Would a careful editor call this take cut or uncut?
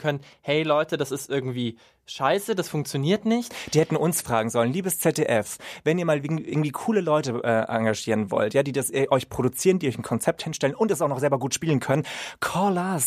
uncut